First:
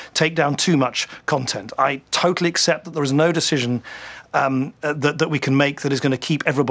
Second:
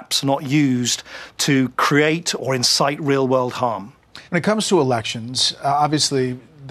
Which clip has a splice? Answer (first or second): second